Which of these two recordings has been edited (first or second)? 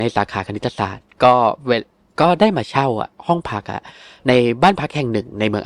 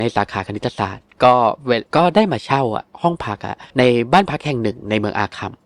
second